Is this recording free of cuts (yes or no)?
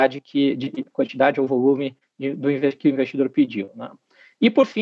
yes